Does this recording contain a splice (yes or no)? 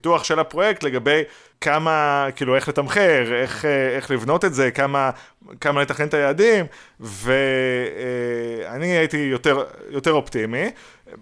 no